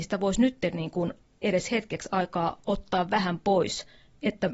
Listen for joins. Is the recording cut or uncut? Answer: uncut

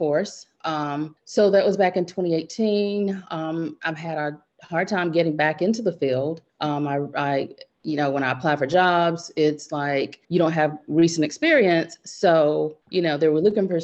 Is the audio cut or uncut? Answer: cut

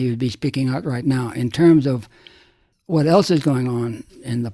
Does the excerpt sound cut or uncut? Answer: uncut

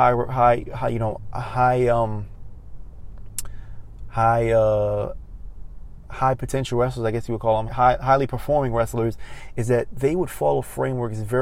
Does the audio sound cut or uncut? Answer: cut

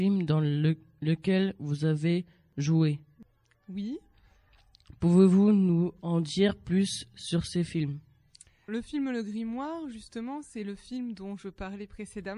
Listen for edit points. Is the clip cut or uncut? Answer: cut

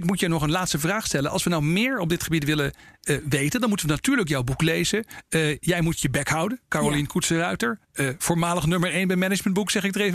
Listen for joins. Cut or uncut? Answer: uncut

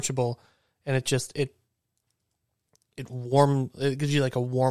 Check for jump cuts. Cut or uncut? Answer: uncut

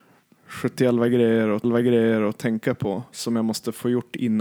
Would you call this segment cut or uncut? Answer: cut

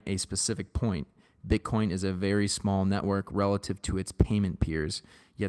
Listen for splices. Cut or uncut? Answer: uncut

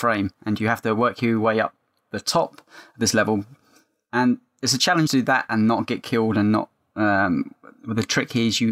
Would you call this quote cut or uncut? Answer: cut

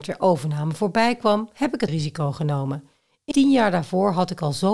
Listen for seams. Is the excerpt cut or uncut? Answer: cut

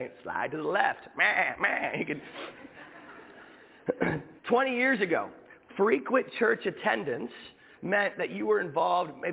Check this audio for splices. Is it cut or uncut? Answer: cut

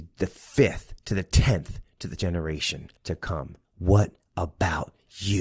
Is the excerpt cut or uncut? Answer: cut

